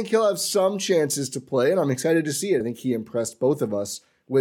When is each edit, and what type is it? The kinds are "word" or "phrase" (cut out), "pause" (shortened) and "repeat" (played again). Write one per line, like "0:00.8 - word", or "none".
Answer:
0:02.6 - word